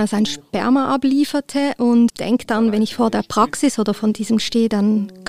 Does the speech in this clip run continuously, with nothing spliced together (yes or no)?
no